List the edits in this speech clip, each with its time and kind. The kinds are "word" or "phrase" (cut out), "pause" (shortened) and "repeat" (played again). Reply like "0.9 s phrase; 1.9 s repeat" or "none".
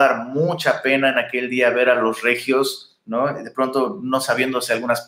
none